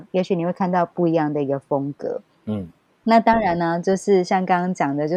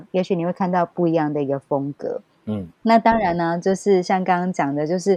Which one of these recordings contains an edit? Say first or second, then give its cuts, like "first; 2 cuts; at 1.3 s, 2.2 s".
second; 1 cut; at 2.7 s